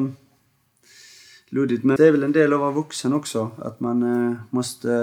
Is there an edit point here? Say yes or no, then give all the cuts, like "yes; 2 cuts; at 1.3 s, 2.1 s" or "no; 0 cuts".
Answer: yes; 1 cut; at 2.0 s